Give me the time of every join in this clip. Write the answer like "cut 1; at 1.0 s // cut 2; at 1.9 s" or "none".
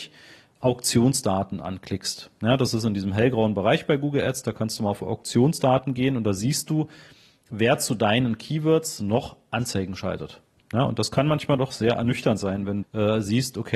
cut 1; at 11.6 s // cut 2; at 12.8 s